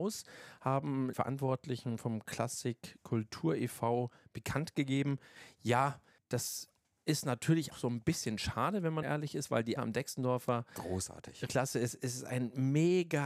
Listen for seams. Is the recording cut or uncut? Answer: cut